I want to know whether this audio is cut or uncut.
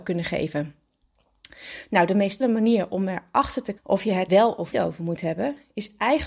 cut